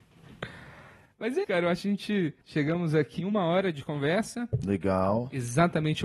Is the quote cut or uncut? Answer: cut